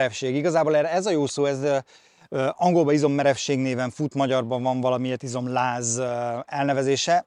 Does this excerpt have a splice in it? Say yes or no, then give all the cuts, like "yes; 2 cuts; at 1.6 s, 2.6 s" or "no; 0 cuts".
no; 0 cuts